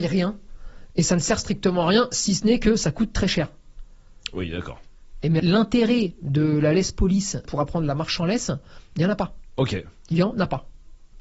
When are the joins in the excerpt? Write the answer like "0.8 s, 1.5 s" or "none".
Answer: 5.4 s, 7.4 s